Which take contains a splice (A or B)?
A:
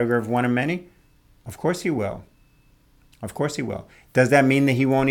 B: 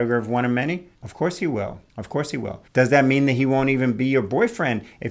B